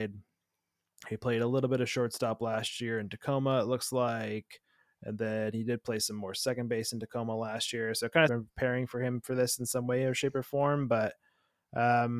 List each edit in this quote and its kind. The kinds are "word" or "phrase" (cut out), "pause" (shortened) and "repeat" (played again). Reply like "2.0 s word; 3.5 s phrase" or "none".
4.8 s pause; 8.3 s phrase